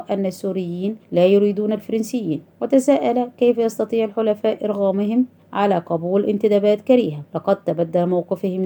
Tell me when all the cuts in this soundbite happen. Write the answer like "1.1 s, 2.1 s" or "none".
1.0 s, 2.5 s, 5.4 s, 7.3 s